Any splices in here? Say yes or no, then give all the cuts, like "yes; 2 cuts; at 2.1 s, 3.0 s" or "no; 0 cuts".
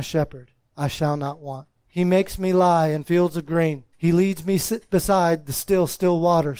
yes; 2 cuts; at 1.8 s, 3.9 s